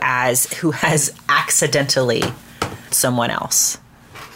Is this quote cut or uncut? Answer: cut